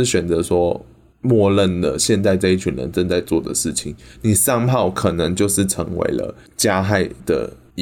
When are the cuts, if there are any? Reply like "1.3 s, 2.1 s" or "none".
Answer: none